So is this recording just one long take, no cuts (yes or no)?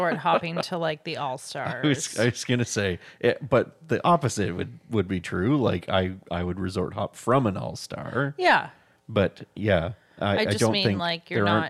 yes